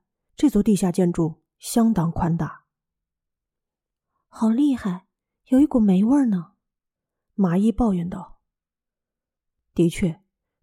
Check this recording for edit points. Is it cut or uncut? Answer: uncut